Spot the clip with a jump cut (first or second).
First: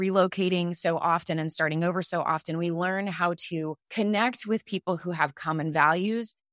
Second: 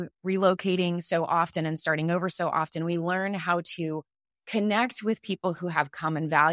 first